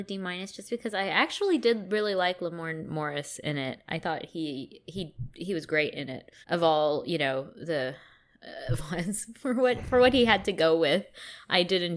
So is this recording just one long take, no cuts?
no; 2 cuts; at 6.4 s, 8.8 s

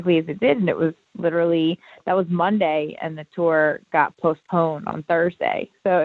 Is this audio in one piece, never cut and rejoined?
yes; 0 cuts

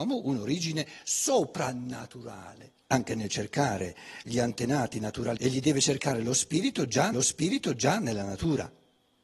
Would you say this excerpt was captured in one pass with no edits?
no; 3 cuts; at 2.8 s, 5.4 s, 7.1 s

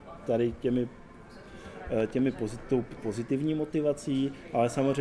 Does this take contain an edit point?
yes; 1 cut; at 3.0 s

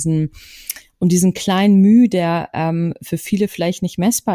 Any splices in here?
no; 0 cuts

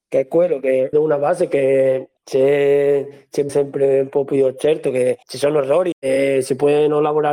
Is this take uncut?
no; 5 cuts; at 0.9 s, 2.2 s, 3.5 s, 5.2 s, 5.9 s

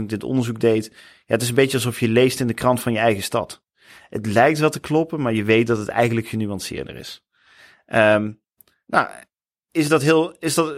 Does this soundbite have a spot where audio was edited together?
no; 0 cuts

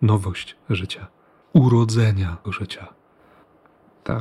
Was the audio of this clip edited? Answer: yes; 2 cuts; at 1.4 s, 2.4 s

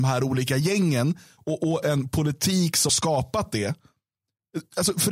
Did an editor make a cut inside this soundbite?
yes; 1 cut; at 2.9 s

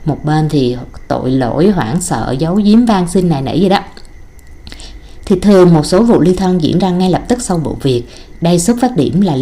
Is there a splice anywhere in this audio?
no; 0 cuts

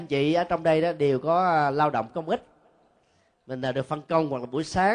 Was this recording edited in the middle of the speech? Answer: no; 0 cuts

